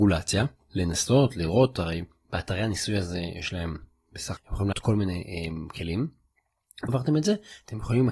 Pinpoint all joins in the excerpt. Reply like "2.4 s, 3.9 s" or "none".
4.4 s, 4.7 s, 6.9 s